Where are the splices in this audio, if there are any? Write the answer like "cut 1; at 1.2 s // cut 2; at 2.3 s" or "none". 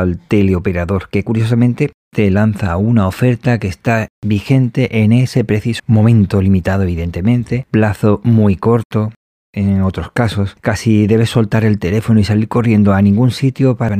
cut 1; at 5.8 s